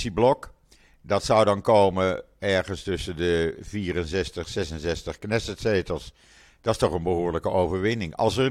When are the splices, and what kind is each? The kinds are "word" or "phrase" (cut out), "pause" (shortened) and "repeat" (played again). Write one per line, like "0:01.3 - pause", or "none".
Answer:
none